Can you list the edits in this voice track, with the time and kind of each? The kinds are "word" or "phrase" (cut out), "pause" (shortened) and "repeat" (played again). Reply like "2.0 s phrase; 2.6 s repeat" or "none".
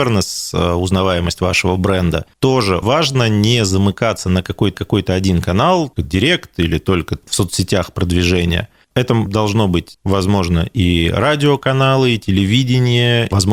2.8 s word; 4.7 s repeat; 6.0 s word